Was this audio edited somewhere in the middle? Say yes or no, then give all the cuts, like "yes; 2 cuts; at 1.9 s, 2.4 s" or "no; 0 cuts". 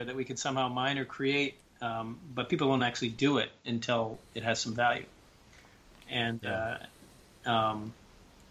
no; 0 cuts